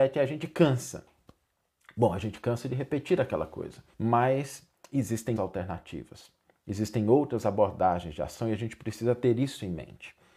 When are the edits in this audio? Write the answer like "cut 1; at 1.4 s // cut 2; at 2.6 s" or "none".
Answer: cut 1; at 3.9 s // cut 2; at 5.4 s